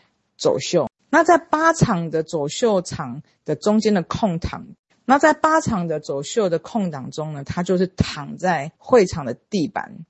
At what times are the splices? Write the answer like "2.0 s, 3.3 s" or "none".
8.8 s